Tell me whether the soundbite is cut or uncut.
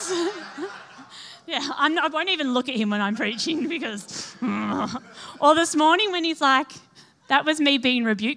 uncut